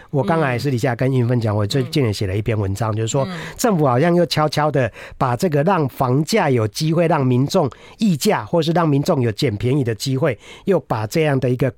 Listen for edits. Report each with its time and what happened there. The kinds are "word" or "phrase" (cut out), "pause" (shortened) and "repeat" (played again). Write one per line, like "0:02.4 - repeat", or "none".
none

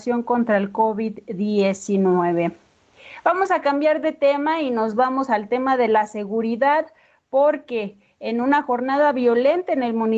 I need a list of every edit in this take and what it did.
none

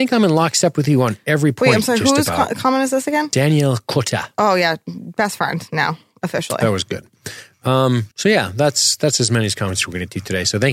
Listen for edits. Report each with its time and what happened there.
0:08.1 - pause

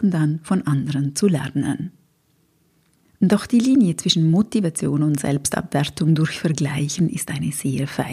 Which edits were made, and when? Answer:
none

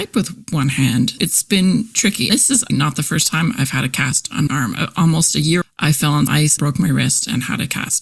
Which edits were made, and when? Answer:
0:01.2 - word
0:02.3 - word
0:02.7 - word
0:04.5 - word
0:05.6 - word
0:06.3 - word
0:06.6 - word

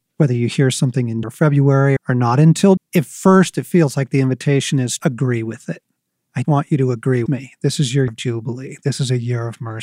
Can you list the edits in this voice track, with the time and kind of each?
0:01.2 - word
0:02.0 - word
0:02.8 - word
0:05.0 - word
0:06.4 - word
0:07.3 - word
0:08.1 - word

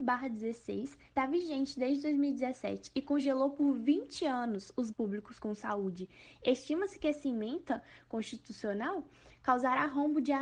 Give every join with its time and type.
0:01.2 - word
0:04.9 - word

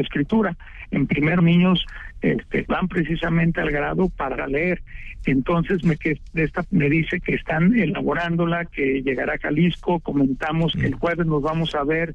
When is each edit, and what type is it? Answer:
0:01.4 - word
0:02.7 - word
0:04.4 - word
0:06.0 - word
0:06.6 - word

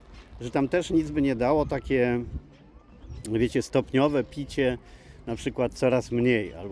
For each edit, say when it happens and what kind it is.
none

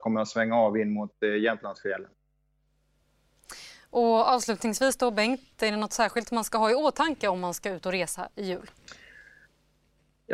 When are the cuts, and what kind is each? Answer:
none

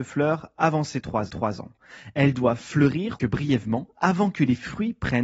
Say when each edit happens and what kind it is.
0:01.3 - repeat
0:03.2 - word

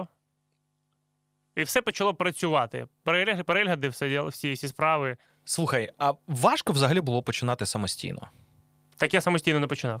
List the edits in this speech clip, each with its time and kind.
none

